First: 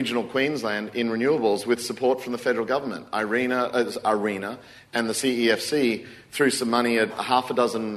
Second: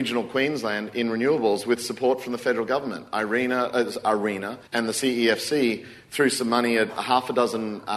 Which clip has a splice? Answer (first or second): second